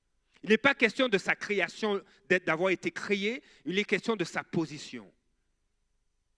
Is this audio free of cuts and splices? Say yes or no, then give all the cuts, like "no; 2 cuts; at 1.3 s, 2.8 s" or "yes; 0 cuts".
yes; 0 cuts